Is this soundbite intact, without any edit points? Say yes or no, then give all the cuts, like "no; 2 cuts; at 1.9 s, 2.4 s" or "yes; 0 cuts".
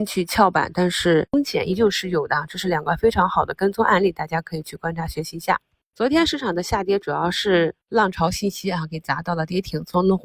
yes; 0 cuts